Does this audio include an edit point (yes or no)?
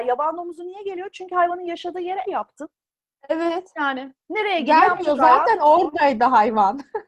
yes